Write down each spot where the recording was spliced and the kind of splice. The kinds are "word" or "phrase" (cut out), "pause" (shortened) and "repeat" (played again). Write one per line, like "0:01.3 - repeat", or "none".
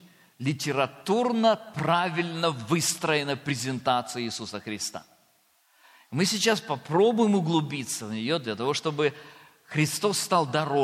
none

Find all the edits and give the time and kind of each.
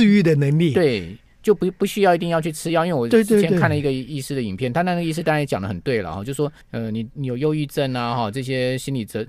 0:06.6 - pause

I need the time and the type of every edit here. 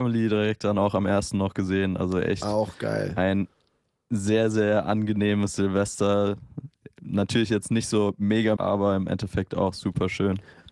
0:08.6 - phrase

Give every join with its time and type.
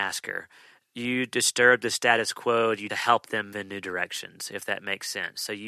0:02.9 - phrase
0:03.5 - word

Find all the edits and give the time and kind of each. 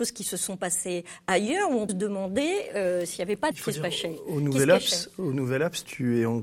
0:01.9 - word
0:03.5 - phrase

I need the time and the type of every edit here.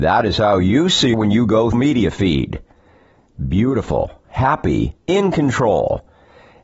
0:01.1 - word
0:01.7 - phrase
0:05.0 - pause

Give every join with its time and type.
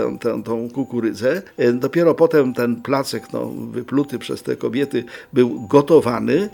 none

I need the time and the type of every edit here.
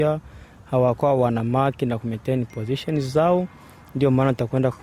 none

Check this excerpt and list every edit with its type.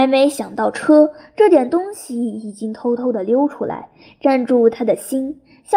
none

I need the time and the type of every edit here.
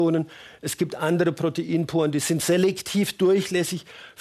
none

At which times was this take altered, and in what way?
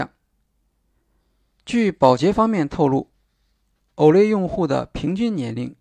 none

